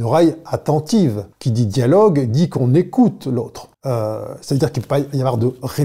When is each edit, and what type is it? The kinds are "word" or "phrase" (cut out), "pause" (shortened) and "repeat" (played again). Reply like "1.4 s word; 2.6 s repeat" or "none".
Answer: 1.3 s pause; 3.7 s pause